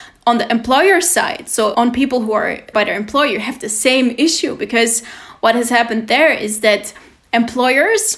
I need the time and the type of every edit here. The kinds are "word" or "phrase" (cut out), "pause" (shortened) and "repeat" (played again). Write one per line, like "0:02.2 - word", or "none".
0:01.7 - word
0:02.7 - word